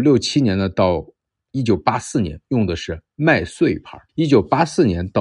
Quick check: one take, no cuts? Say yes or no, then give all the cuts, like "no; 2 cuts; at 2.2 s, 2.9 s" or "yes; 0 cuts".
no; 1 cut; at 4.1 s